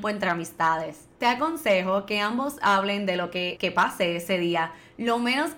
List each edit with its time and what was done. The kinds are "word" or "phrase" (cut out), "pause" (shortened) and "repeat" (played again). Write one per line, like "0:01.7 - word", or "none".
0:01.1 - pause
0:03.6 - phrase